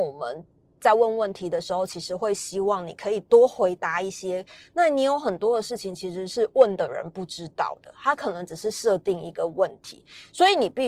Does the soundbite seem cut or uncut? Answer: uncut